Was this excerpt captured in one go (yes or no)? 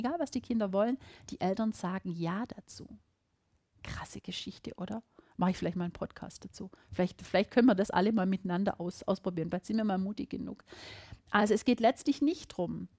yes